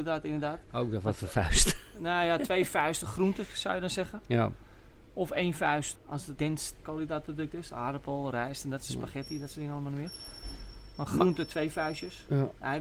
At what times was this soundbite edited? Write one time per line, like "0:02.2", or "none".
0:06.0
0:06.4
0:06.8